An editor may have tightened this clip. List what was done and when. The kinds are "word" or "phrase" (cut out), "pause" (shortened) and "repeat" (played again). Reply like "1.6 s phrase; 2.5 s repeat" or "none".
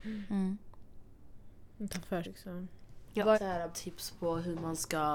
2.2 s word; 3.3 s word; 3.7 s word